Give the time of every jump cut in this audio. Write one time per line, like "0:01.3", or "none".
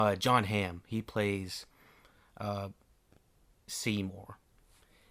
0:03.6